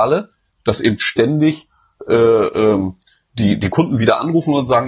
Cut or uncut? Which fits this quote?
uncut